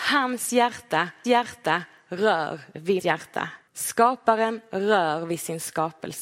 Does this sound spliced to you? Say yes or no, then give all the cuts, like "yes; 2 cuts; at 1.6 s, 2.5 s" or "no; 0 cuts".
yes; 3 cuts; at 1.2 s, 3.0 s, 3.7 s